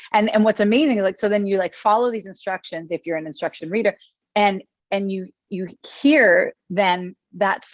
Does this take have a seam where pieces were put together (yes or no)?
no